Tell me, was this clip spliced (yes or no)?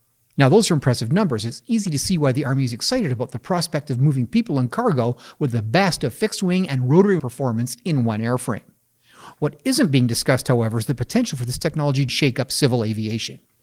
yes